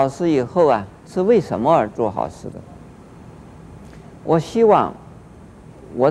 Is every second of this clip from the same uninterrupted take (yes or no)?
no